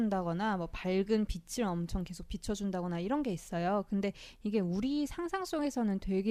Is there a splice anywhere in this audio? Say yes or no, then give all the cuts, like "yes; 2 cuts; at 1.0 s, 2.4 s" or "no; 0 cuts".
no; 0 cuts